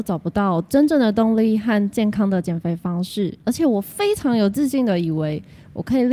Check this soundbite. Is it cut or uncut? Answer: cut